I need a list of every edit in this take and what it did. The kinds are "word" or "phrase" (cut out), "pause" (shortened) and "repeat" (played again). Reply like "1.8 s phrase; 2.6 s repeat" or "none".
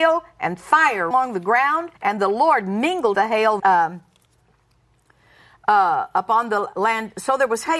1.1 s word; 2.0 s pause; 3.1 s word; 3.6 s word; 6.7 s word